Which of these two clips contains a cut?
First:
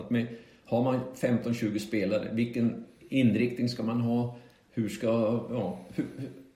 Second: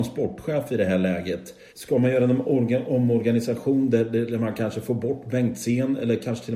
second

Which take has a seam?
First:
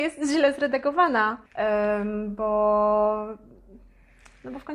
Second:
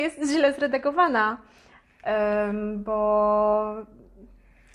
first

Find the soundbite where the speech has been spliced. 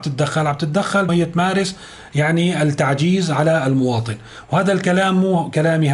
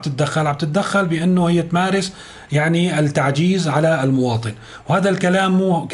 first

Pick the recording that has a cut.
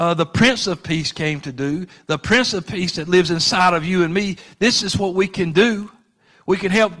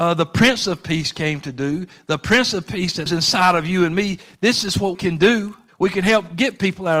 second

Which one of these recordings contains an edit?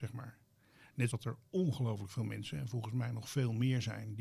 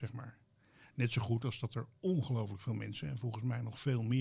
first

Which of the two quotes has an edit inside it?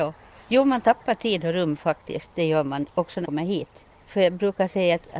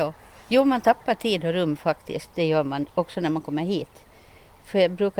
first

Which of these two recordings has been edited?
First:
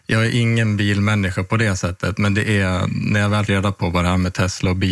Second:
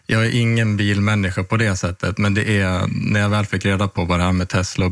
first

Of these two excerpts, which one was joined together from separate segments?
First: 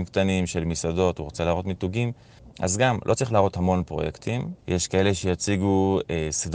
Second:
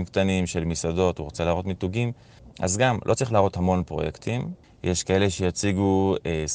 first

